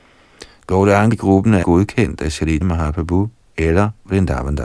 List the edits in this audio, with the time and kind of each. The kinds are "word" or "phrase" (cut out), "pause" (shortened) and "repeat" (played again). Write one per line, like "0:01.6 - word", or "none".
0:01.1 - word
0:01.6 - word
0:02.6 - word

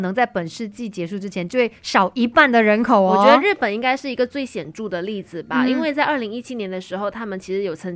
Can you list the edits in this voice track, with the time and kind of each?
0:01.8 - pause

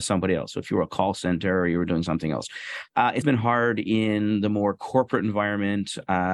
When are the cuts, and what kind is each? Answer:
0:03.2 - word

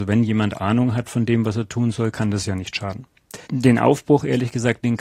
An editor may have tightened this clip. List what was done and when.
0:03.4 - pause

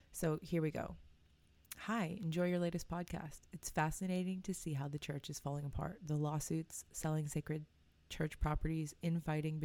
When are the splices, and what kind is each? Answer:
none

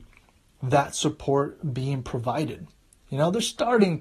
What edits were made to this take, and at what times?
none

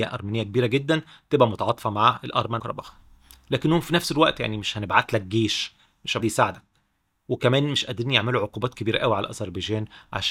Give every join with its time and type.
0:02.6 - phrase
0:06.2 - phrase

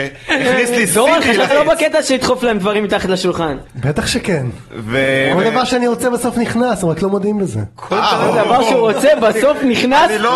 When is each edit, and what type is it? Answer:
0:01.5 - word

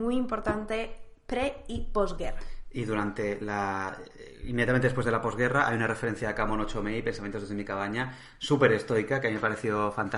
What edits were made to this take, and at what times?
none

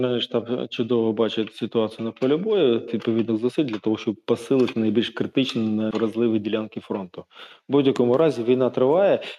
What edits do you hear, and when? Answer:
0:02.9 - word
0:05.9 - word

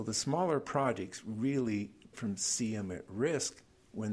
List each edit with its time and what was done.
0:02.1 - word

